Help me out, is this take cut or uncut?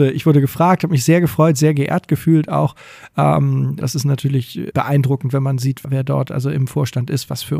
cut